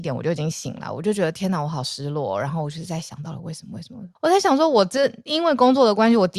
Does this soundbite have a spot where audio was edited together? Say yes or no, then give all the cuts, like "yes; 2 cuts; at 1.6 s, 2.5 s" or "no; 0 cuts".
yes; 1 cut; at 4.2 s